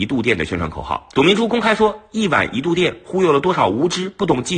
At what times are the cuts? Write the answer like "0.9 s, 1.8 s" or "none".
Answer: 1.1 s